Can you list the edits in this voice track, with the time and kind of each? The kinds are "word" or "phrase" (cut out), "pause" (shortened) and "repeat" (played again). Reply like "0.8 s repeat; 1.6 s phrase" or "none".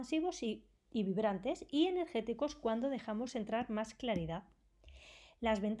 none